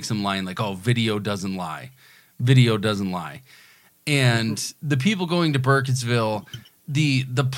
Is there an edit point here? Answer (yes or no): no